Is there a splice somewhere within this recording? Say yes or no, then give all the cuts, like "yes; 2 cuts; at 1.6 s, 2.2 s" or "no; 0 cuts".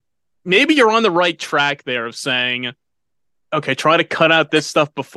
no; 0 cuts